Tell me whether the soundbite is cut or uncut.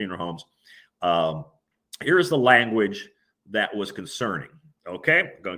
uncut